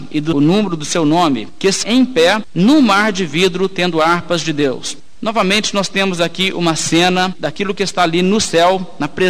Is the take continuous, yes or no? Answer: no